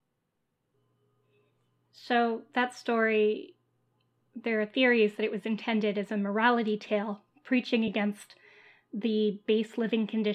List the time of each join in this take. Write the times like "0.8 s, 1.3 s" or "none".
none